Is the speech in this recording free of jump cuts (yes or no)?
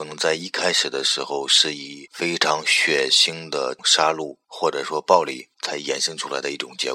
no